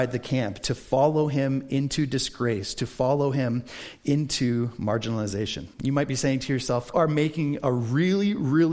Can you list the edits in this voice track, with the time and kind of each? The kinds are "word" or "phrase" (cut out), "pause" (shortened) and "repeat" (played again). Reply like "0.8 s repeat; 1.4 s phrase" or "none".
5.7 s pause; 6.9 s phrase